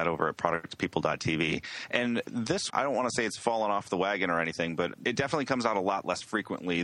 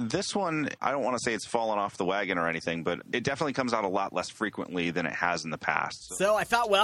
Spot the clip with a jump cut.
first; 1 cut; at 2.7 s

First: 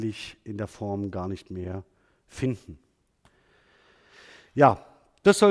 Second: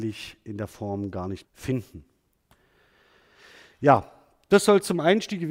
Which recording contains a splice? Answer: second; 1 cut; at 1.4 s

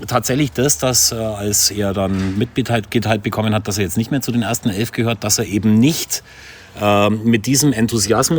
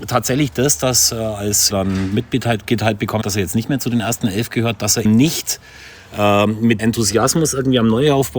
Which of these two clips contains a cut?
second; 4 cuts; at 1.7 s, 3.2 s, 5.0 s, 6.8 s

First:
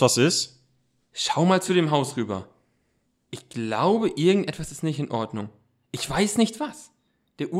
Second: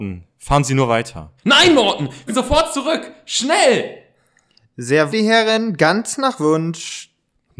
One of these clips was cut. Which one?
second; 3 cuts; at 1.4 s, 2.3 s, 5.1 s

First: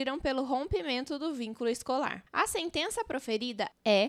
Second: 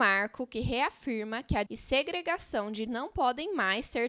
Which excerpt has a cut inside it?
second; 2 cuts; at 1.7 s, 2.9 s

